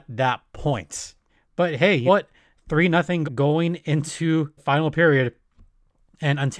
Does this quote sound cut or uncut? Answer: cut